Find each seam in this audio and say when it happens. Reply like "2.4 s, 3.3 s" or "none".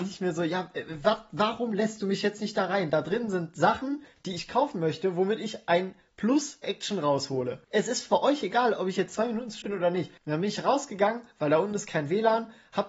6.6 s, 7.6 s, 9.6 s, 10.2 s

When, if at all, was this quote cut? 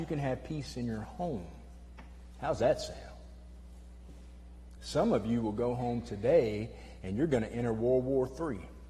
none

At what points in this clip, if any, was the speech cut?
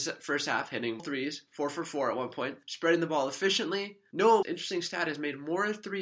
1.0 s, 2.6 s, 4.4 s

